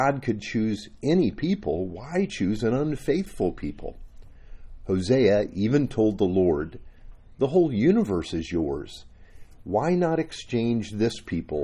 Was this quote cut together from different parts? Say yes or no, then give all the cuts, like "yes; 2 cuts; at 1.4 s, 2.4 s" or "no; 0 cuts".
no; 0 cuts